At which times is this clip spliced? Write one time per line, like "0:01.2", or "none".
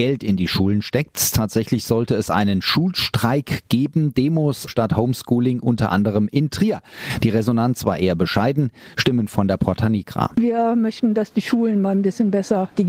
0:04.7